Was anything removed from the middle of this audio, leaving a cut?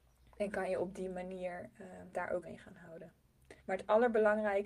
yes; 3 cuts; at 2.1 s, 2.4 s, 3.6 s

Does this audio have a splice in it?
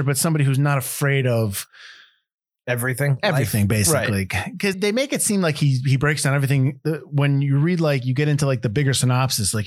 yes; 1 cut; at 4.7 s

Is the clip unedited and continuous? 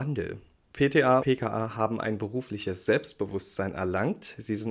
no; 1 cut; at 1.2 s

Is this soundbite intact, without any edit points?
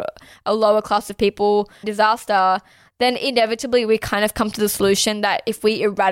no; 1 cut; at 1.8 s

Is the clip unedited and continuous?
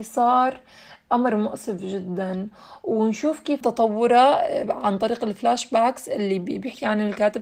no; 1 cut; at 3.6 s

